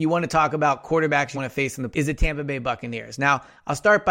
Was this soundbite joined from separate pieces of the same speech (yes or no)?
yes